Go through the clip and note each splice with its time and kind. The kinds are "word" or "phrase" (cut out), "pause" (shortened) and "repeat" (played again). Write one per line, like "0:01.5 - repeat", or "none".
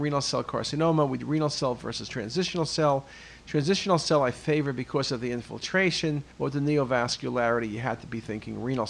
0:01.2 - word
0:06.3 - pause